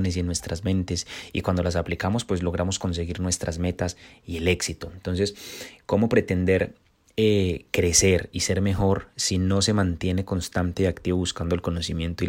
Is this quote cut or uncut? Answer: uncut